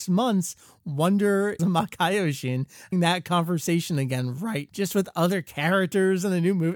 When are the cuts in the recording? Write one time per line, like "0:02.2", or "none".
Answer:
0:01.6
0:02.9
0:04.7